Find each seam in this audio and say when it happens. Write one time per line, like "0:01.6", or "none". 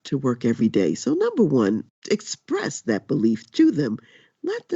none